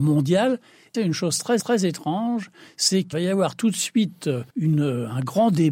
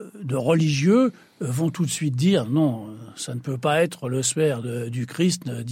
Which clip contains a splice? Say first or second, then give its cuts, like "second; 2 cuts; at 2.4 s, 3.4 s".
first; 4 cuts; at 0.9 s, 1.6 s, 3.1 s, 4.5 s